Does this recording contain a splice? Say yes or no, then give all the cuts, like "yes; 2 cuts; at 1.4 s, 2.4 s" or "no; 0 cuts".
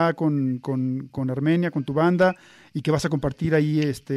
no; 0 cuts